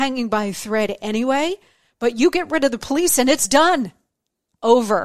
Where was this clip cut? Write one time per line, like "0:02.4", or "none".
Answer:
none